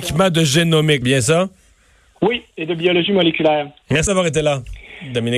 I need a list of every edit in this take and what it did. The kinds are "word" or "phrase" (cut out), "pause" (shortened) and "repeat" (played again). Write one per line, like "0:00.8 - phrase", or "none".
0:01.0 - word
0:04.1 - word